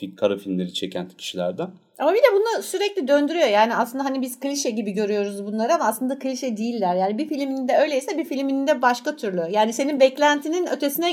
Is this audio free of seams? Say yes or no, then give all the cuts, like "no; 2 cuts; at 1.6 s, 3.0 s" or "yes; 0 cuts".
yes; 0 cuts